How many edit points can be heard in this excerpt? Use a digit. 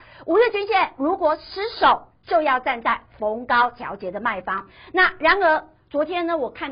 0